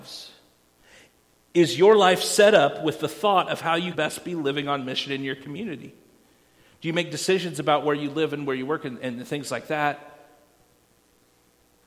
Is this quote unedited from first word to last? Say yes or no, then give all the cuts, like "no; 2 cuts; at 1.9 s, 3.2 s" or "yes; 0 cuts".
no; 1 cut; at 3.9 s